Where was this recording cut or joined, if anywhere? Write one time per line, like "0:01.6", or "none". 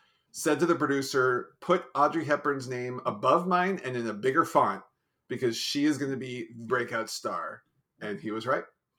0:06.7